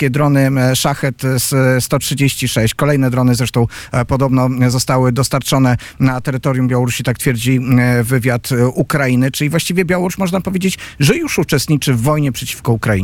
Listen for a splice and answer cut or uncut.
uncut